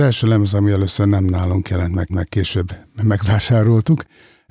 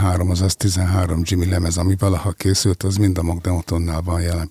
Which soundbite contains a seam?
first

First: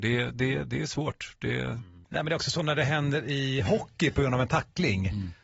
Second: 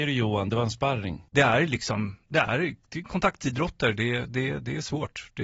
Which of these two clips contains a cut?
second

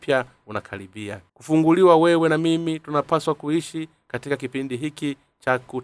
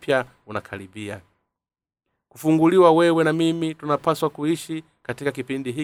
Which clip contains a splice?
first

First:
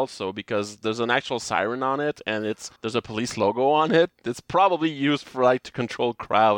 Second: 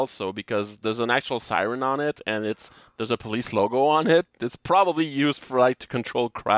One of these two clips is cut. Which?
first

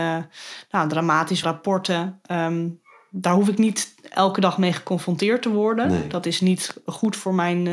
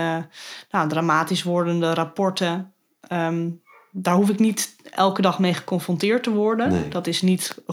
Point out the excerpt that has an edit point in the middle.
first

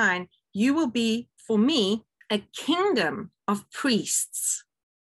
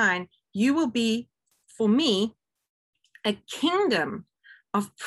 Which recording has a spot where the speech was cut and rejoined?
first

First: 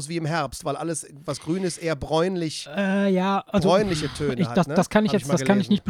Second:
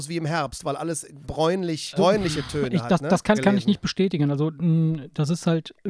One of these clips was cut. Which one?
second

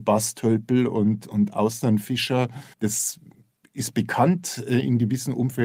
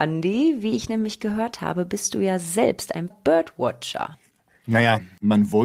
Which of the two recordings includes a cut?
second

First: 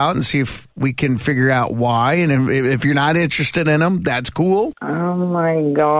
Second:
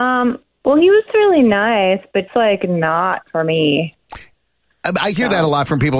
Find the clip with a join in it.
second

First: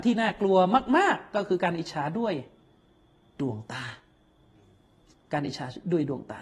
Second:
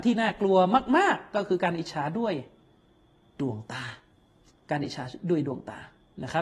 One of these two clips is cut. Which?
second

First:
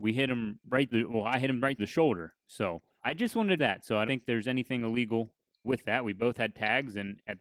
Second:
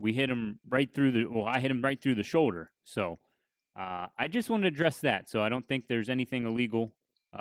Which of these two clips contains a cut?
first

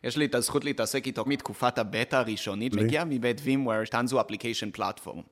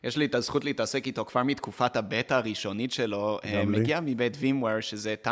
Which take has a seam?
first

